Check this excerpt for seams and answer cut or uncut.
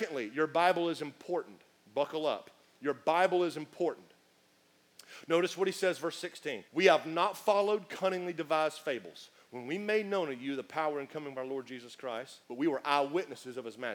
cut